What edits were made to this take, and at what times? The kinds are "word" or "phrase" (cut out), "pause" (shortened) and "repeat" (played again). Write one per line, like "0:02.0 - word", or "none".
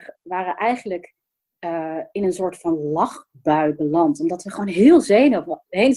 none